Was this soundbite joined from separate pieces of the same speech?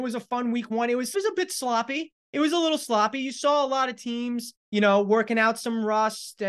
yes; 3 cuts; at 1.1 s, 2.2 s, 4.6 s

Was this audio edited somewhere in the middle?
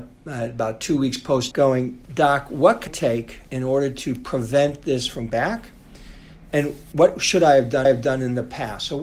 yes; 7 cuts; at 1.5 s, 2.0 s, 2.9 s, 3.4 s, 5.3 s, 6.9 s, 7.8 s

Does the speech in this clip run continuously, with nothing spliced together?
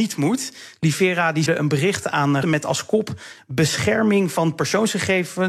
no; 2 cuts; at 1.5 s, 2.4 s

